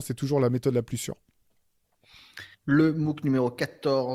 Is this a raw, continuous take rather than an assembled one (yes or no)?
no